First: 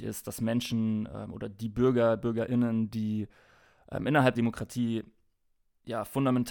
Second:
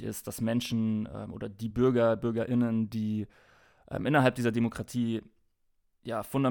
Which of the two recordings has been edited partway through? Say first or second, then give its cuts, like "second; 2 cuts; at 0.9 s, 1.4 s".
first; 1 cut; at 4.3 s